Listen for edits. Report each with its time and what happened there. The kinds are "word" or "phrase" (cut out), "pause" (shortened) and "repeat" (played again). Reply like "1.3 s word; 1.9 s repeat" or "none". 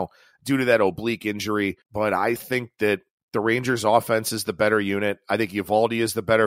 1.8 s pause; 2.4 s word; 3.1 s pause